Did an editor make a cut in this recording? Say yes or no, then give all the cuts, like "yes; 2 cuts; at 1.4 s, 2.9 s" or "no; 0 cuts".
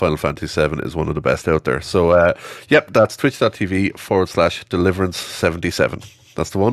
no; 0 cuts